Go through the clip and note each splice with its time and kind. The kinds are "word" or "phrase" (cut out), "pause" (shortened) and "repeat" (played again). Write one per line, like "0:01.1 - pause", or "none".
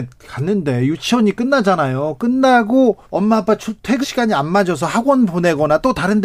0:03.0 - pause
0:04.0 - word